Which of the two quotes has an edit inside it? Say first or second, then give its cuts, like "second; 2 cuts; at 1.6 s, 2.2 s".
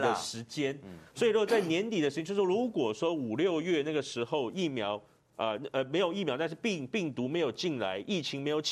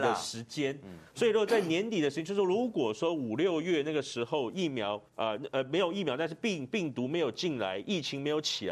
second; 1 cut; at 5.1 s